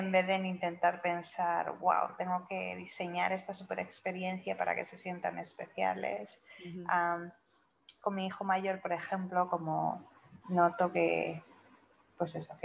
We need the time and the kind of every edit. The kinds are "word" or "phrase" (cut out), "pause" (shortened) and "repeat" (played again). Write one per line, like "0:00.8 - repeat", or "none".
0:10.4 - word